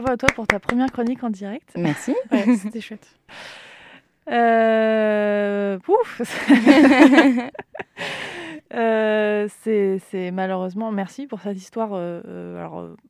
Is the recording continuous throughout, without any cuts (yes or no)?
yes